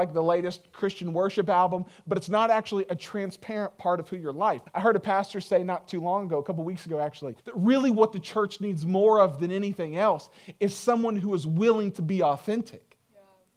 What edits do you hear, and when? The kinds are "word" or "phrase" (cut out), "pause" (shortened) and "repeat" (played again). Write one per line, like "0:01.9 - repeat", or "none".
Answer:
0:04.7 - pause
0:07.4 - pause